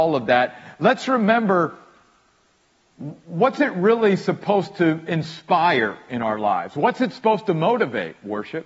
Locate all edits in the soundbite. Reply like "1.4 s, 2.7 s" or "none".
none